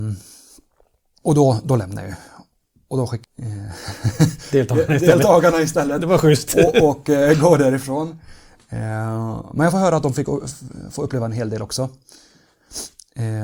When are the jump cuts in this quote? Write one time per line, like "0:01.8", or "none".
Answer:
0:03.2

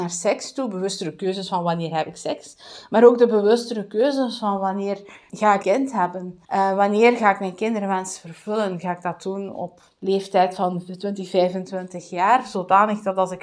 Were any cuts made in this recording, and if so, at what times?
0:05.3
0:05.6
0:06.4
0:09.9

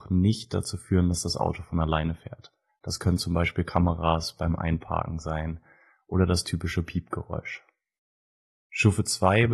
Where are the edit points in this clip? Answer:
none

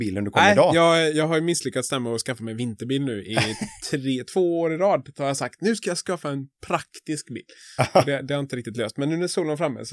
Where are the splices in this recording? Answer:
none

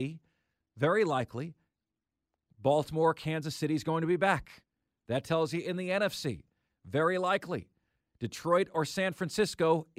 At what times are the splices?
none

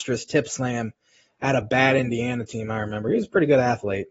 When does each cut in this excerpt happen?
none

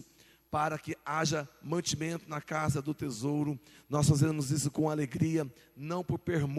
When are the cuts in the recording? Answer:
none

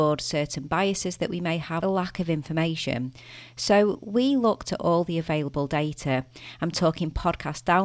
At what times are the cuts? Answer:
0:01.8

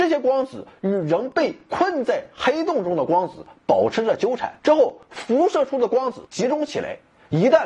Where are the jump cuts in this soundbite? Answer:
0:04.6
0:06.3

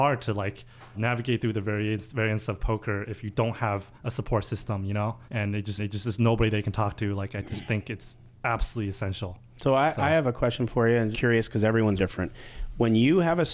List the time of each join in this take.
0:00.9
0:04.0
0:05.3
0:05.8
0:11.1
0:12.0

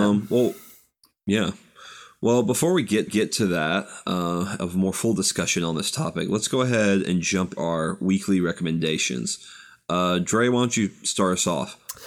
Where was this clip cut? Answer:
0:03.1
0:07.6

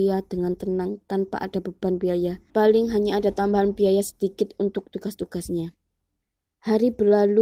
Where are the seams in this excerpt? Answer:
0:02.5
0:06.2

